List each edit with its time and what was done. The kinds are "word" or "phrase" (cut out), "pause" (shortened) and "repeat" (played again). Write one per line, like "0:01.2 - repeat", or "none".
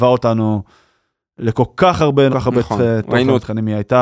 0:02.3 - word